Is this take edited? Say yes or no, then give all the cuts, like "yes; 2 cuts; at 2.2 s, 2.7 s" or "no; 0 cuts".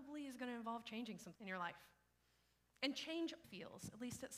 yes; 2 cuts; at 1.3 s, 3.4 s